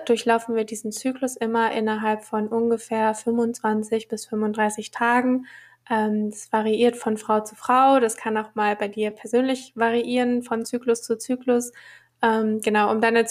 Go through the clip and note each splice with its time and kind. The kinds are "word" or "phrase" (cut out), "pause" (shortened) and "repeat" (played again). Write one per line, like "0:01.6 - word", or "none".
none